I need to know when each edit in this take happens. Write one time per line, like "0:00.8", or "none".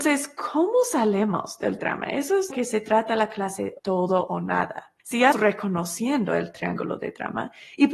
0:01.8
0:02.5
0:03.8
0:05.0
0:05.3